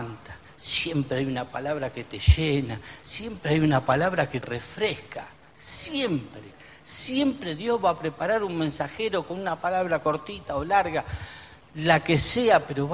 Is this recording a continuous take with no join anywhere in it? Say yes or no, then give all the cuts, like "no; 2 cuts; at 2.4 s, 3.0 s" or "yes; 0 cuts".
no; 1 cut; at 4.4 s